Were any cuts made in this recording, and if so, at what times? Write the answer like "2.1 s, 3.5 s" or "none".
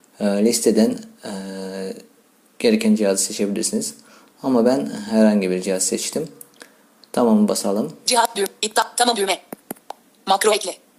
8.3 s

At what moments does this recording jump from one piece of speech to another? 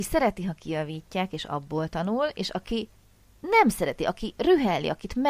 none

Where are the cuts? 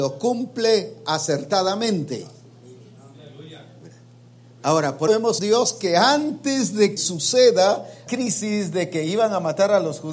5.1 s, 5.4 s, 7.0 s, 8.1 s

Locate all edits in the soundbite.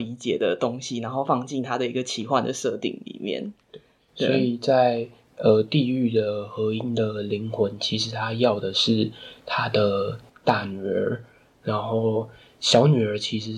none

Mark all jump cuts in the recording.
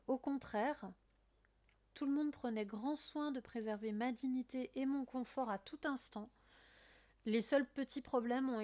none

